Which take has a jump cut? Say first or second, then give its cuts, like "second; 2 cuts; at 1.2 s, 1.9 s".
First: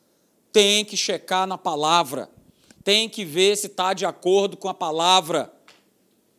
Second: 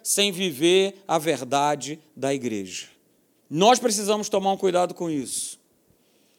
second; 1 cut; at 3.4 s